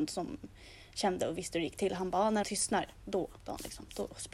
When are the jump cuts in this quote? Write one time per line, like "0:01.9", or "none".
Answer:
0:02.4
0:03.4

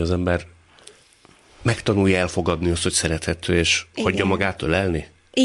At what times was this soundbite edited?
none

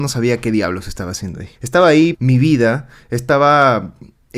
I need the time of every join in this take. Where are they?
0:01.6
0:02.1

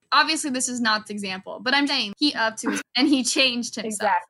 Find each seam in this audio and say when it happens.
0:01.1
0:01.9
0:02.3
0:02.8

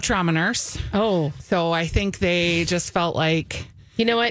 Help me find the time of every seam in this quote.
none

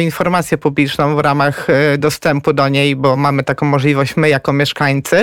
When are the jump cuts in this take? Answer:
none

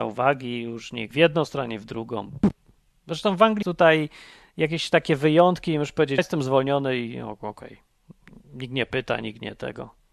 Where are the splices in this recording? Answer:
0:01.1
0:03.6
0:06.2

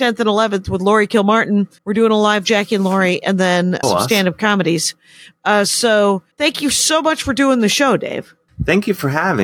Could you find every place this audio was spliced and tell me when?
0:01.8
0:03.8
0:06.3
0:08.5

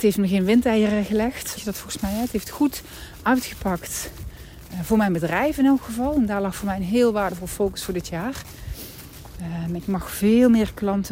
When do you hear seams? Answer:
0:01.6

